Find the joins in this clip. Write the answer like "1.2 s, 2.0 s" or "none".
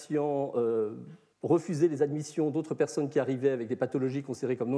1.3 s